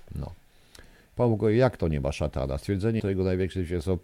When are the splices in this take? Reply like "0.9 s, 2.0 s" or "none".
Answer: 3.0 s